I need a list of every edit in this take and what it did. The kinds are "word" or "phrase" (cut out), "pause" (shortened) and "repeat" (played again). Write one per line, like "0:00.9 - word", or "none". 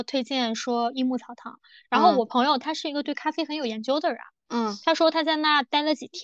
none